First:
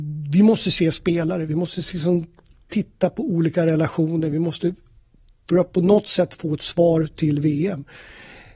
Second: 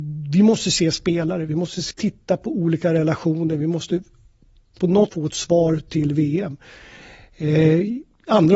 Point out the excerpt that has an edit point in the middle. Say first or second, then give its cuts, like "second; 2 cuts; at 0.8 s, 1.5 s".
second; 3 cuts; at 1.9 s, 4.8 s, 5.1 s